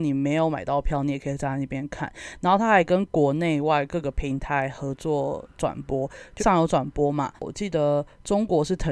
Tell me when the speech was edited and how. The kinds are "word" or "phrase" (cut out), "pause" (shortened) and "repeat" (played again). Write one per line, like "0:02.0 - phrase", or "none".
0:06.4 - word
0:07.4 - pause

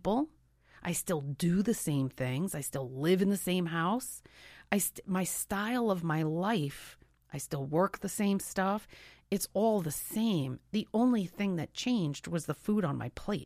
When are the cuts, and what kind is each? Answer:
none

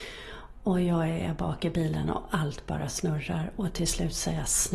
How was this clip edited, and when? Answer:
none

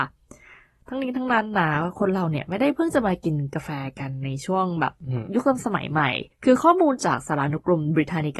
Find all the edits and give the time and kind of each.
0:06.3 - pause

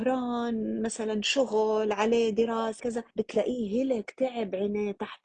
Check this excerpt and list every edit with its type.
0:02.8 - word
0:03.1 - pause

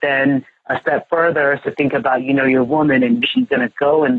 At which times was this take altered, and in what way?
0:03.2 - word

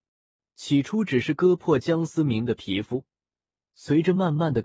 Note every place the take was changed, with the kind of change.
none

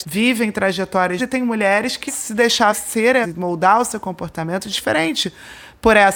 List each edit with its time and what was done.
0:01.2 - word
0:02.1 - word
0:02.7 - word
0:03.2 - word
0:04.7 - word

